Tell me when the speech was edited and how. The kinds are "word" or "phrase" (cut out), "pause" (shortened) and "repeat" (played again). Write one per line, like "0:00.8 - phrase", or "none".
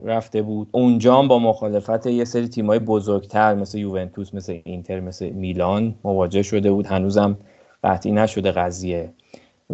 none